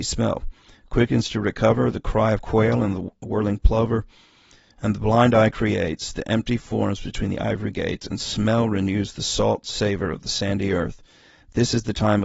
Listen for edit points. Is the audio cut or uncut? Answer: uncut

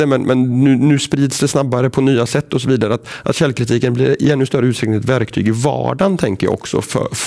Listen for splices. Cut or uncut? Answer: uncut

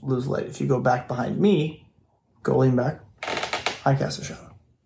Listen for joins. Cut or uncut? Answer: uncut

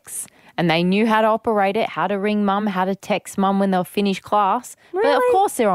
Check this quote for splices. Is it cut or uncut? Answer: uncut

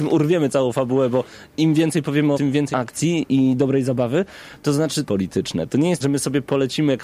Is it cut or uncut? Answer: cut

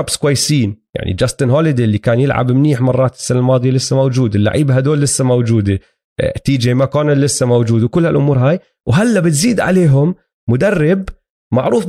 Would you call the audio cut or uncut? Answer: uncut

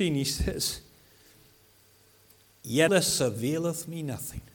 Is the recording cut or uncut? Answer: cut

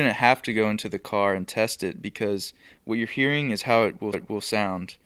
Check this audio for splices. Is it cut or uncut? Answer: cut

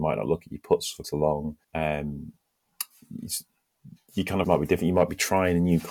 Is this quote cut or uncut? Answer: cut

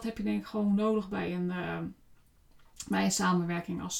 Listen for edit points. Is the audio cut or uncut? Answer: uncut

